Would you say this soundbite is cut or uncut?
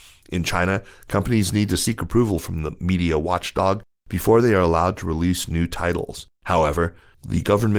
cut